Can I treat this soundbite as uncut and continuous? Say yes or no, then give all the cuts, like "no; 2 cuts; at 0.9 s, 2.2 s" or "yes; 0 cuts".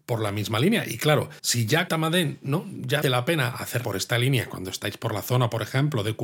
no; 4 cuts; at 1.4 s, 1.9 s, 3.0 s, 3.8 s